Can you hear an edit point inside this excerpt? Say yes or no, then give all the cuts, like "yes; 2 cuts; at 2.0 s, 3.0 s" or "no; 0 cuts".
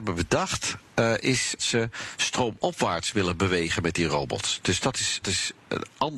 yes; 2 cuts; at 1.6 s, 5.2 s